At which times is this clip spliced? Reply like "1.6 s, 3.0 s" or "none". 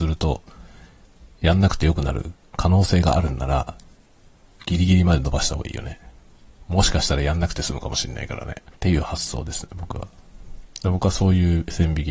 8.8 s